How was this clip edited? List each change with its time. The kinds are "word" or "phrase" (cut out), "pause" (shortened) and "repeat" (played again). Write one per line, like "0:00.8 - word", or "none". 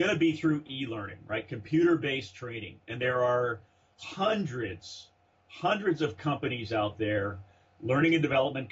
none

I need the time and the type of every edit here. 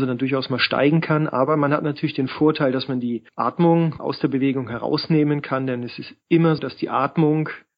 0:04.0 - phrase
0:06.6 - word

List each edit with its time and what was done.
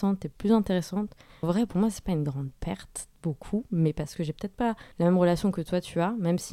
0:01.4 - word
0:04.9 - pause

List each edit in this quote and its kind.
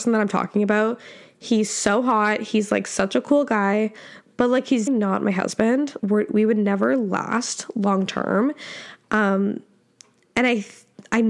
0:04.9 - word
0:06.0 - word

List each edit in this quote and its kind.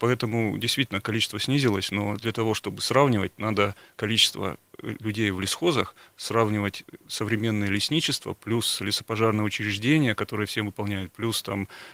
none

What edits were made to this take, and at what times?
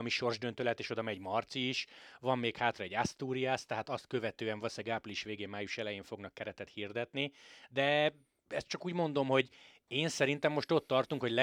none

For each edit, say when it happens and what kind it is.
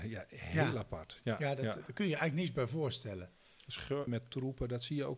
0:04.1 - word

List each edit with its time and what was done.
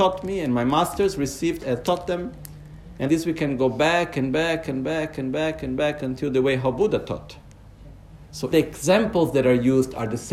0:01.8 - phrase
0:03.1 - word
0:08.5 - word

